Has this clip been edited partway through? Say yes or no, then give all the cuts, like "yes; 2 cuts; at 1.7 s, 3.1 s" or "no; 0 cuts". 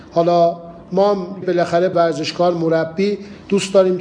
yes; 2 cuts; at 1.4 s, 1.9 s